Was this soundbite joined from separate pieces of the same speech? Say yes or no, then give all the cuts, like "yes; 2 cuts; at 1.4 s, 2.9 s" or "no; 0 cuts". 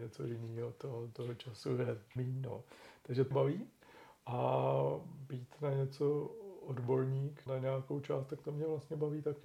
yes; 3 cuts; at 2.2 s, 3.3 s, 7.5 s